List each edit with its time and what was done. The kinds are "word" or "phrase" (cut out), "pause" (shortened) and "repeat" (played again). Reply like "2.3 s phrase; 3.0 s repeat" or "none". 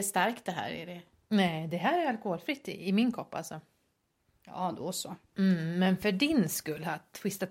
none